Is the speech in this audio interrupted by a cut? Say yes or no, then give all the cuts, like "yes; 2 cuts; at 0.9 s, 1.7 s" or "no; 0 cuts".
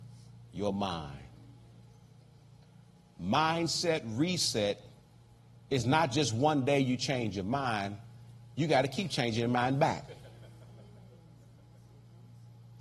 no; 0 cuts